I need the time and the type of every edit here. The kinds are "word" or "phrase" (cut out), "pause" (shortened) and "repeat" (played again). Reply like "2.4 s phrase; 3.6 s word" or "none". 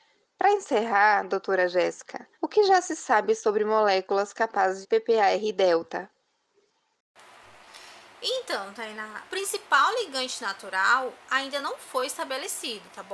2.3 s pause; 4.8 s phrase; 9.3 s word